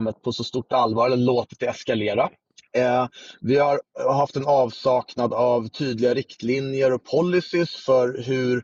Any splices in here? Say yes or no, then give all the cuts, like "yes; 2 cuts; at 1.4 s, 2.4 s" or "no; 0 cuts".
yes; 1 cut; at 2.4 s